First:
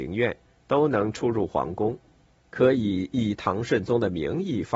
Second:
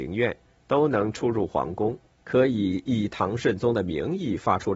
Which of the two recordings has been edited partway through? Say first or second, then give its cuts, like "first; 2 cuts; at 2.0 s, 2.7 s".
second; 1 cut; at 2.1 s